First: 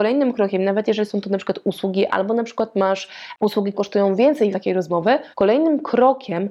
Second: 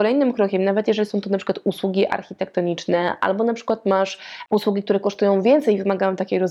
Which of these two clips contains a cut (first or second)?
first